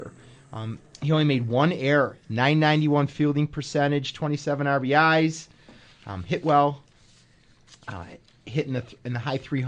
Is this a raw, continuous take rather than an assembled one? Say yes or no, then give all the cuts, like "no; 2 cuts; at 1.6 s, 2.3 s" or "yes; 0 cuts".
yes; 0 cuts